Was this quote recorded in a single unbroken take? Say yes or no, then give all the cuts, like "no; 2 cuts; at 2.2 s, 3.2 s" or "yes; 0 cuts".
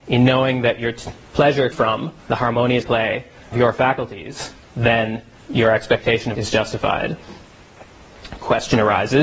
no; 6 cuts; at 1.7 s, 2.2 s, 2.8 s, 3.5 s, 5.3 s, 6.3 s